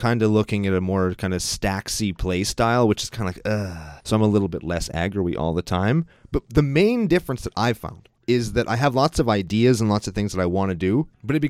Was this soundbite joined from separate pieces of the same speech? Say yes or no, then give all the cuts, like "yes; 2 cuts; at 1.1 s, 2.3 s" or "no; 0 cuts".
yes; 1 cut; at 4.0 s